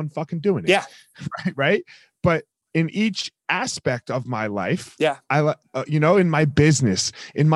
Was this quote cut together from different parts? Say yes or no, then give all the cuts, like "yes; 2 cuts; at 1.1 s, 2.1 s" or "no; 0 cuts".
no; 0 cuts